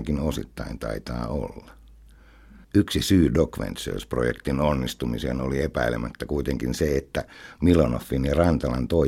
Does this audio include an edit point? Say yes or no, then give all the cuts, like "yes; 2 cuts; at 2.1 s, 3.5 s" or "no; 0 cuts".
yes; 1 cut; at 2.6 s